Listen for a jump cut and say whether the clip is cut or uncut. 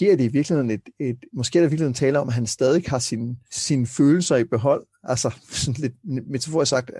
cut